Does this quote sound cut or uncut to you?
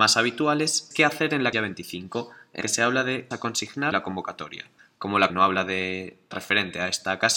cut